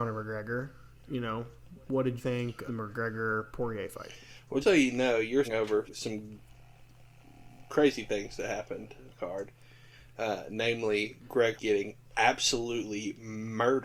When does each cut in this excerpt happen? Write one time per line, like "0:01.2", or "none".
0:02.2
0:02.7
0:04.6
0:05.4
0:05.9
0:09.1
0:11.6